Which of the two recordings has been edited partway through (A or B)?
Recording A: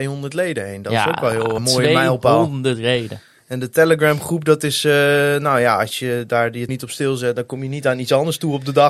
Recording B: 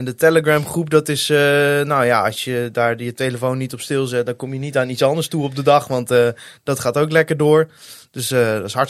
A